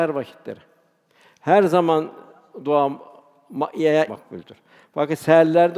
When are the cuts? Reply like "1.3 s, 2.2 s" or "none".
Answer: 4.1 s